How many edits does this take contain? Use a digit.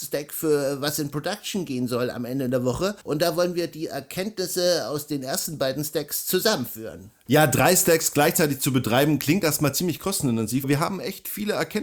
2